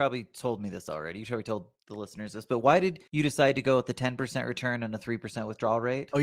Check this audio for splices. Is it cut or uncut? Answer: cut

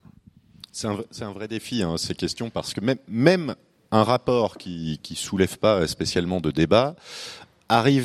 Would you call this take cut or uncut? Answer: uncut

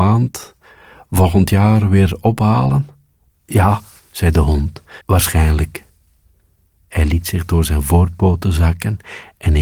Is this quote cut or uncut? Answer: cut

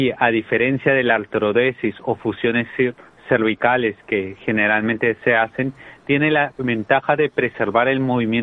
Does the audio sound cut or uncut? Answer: uncut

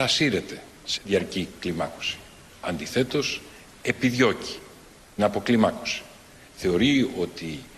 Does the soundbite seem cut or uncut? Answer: cut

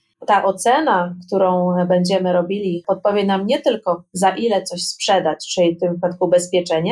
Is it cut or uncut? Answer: uncut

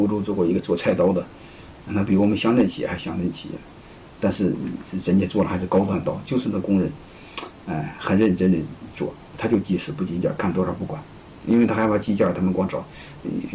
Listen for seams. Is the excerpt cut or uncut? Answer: uncut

